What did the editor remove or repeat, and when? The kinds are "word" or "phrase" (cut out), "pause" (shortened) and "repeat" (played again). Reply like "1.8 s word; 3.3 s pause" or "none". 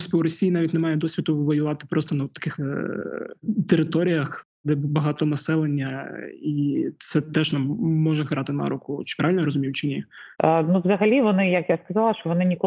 2.6 s word; 10.3 s pause